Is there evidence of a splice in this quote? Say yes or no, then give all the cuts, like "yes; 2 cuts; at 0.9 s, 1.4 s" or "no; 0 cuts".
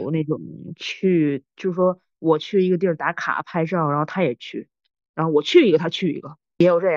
no; 0 cuts